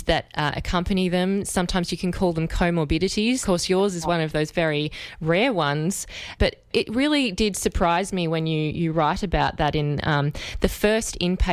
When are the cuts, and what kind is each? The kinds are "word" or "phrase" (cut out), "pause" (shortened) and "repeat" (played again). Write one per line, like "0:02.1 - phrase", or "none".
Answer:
0:03.4 - word